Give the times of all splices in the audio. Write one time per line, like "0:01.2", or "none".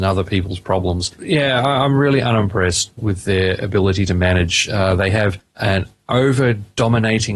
0:01.1